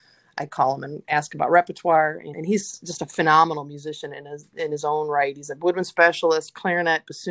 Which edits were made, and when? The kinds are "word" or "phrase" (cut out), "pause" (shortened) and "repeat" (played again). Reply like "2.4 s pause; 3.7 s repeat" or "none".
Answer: 2.3 s word